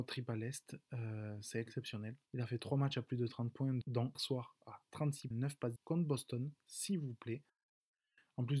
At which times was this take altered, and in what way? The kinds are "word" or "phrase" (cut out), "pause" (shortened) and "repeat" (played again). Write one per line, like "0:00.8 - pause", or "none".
0:02.3 - pause
0:04.1 - phrase
0:05.3 - word
0:05.8 - word